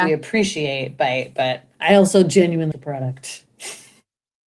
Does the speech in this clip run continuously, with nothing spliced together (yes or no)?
no